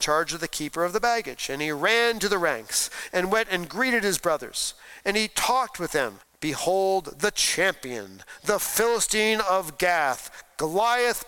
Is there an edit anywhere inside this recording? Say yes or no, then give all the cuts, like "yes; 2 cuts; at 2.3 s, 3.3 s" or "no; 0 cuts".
yes; 1 cut; at 6.2 s